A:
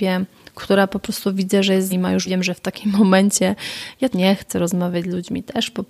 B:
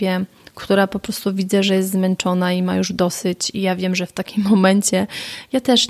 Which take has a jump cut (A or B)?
A